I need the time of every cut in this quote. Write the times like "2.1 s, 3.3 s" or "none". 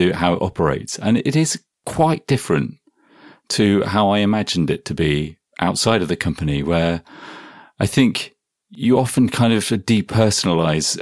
none